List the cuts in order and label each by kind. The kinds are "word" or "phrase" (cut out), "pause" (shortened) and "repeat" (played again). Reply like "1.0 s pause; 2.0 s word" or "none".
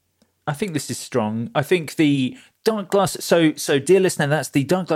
none